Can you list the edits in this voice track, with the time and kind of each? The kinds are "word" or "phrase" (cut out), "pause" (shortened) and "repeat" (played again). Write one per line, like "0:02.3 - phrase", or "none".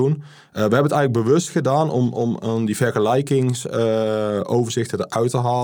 none

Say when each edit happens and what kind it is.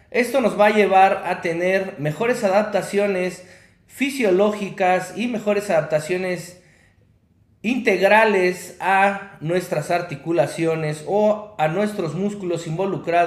none

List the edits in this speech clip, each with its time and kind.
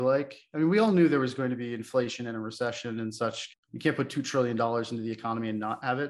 0:03.5 - word

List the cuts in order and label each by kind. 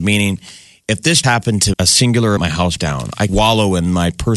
0:01.2 - word
0:01.7 - word
0:02.4 - word
0:02.8 - word
0:03.3 - word

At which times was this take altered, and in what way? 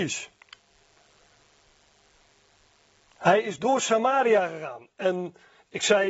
none

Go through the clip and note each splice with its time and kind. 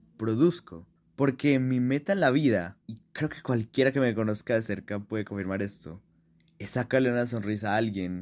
0:01.0 - pause
0:02.8 - pause

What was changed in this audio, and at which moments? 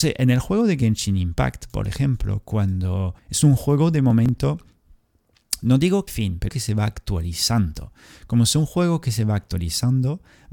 0:03.2 - pause
0:06.1 - phrase
0:06.5 - phrase

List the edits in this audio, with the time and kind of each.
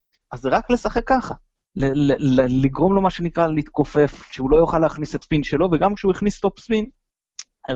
0:05.2 - word

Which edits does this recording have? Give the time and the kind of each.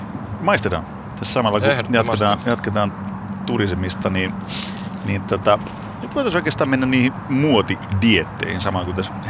none

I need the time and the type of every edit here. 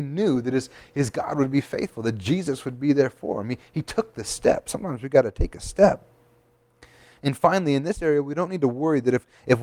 none

